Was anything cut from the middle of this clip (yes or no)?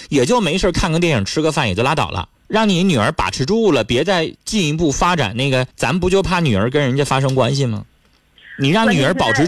yes